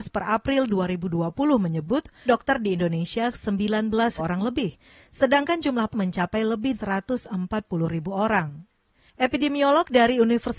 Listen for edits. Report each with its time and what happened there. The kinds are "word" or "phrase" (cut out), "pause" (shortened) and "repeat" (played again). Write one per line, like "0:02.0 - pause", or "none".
0:02.3 - word
0:03.3 - word
0:04.2 - word
0:05.9 - word
0:06.7 - word